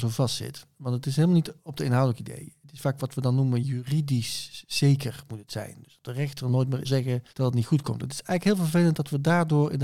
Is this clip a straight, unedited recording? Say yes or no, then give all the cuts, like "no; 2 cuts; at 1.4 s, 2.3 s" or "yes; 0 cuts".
no; 3 cuts; at 1.6 s, 6.8 s, 7.3 s